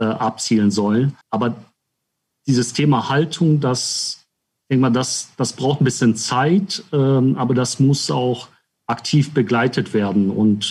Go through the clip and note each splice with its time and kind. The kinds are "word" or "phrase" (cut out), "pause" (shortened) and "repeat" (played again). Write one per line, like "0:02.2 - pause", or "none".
0:01.2 - pause